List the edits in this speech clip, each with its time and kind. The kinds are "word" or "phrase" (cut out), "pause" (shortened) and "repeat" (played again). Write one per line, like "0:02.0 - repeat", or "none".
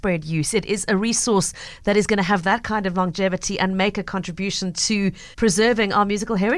0:05.3 - pause